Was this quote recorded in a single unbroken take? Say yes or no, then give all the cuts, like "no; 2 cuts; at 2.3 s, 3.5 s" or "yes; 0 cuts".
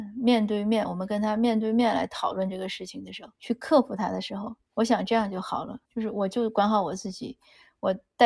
no; 3 cuts; at 3.4 s, 4.6 s, 5.8 s